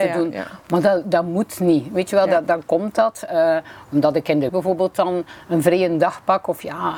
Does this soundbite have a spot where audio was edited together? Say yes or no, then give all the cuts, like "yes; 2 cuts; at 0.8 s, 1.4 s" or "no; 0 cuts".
yes; 1 cut; at 4.5 s